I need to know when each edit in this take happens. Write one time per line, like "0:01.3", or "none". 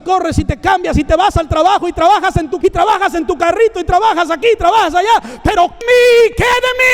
0:02.6
0:05.8